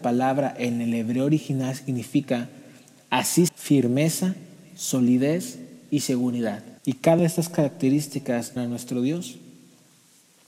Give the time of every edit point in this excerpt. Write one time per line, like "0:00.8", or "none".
0:03.5
0:06.8
0:07.2
0:08.6